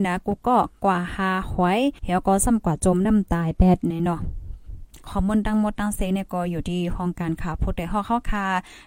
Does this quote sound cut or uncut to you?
cut